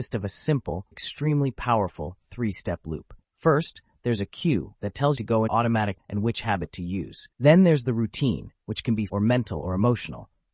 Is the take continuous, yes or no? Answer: no